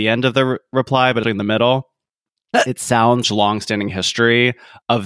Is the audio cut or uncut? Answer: cut